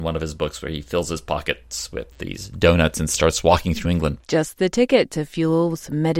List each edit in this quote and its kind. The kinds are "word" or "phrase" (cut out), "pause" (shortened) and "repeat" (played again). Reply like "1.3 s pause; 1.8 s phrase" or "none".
3.8 s word